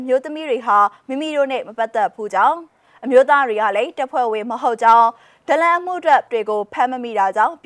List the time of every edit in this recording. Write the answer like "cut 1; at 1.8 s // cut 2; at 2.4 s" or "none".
cut 1; at 6.3 s